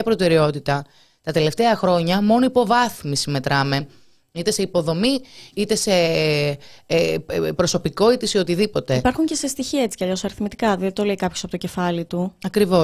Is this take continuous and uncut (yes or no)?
yes